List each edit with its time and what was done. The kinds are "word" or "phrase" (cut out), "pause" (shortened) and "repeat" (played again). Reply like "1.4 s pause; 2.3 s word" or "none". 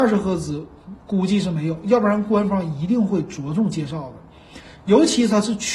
none